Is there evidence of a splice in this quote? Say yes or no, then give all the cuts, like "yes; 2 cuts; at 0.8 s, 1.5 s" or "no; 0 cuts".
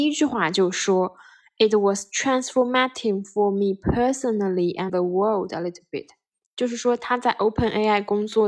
yes; 1 cut; at 4.9 s